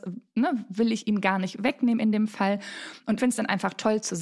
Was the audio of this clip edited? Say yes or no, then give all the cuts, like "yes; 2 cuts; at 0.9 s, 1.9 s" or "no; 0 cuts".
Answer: yes; 1 cut; at 3.2 s